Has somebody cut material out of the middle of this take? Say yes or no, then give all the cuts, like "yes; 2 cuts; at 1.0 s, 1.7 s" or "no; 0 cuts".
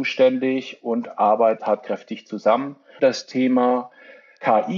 yes; 2 cuts; at 1.6 s, 3.0 s